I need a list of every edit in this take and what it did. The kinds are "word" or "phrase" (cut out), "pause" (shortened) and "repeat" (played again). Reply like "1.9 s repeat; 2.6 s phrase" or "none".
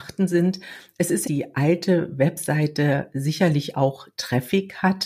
1.2 s phrase